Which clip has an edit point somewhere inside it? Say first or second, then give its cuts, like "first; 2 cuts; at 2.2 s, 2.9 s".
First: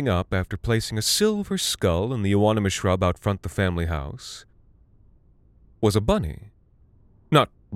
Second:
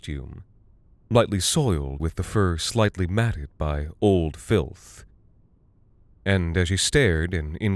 second; 1 cut; at 2.0 s